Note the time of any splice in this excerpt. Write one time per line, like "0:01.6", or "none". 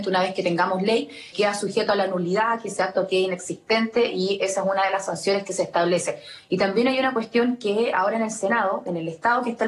0:01.3